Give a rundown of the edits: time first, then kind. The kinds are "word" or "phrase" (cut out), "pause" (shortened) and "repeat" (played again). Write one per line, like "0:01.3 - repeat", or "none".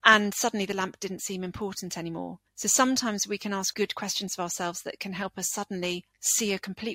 0:02.5 - pause
0:03.7 - word